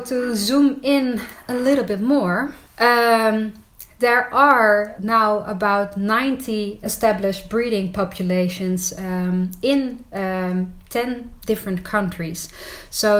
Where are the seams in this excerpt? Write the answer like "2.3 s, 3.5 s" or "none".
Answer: 2.6 s, 5.0 s, 6.8 s